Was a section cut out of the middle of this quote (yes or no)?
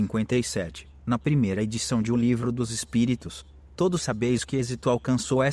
no